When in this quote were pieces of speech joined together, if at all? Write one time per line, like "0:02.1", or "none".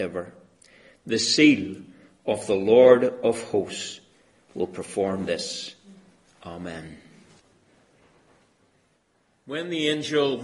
none